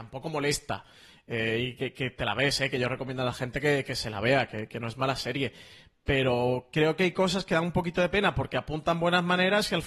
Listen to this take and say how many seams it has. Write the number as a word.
zero